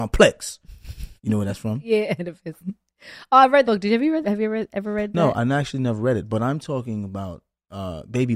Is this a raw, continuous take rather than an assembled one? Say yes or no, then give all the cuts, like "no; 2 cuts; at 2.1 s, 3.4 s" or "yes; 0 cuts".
no; 3 cuts; at 1.2 s, 3.6 s, 4.2 s